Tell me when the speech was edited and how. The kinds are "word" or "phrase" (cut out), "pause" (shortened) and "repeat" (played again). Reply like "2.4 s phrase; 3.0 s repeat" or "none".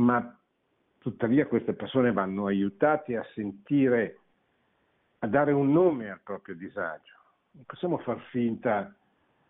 none